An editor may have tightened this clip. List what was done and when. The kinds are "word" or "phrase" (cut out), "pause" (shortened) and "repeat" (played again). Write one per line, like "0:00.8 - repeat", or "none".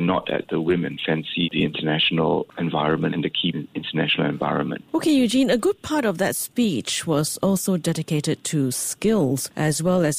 0:01.4 - word
0:03.1 - word
0:03.5 - phrase
0:04.9 - pause